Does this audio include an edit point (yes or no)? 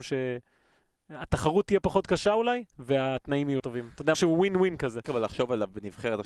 yes